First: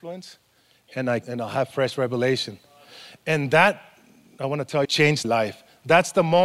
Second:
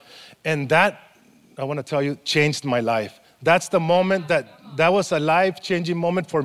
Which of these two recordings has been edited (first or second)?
first